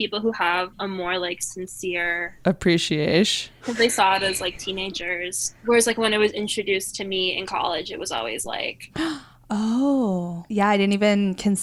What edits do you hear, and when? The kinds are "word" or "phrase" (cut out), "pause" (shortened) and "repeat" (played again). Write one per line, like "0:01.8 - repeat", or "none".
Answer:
none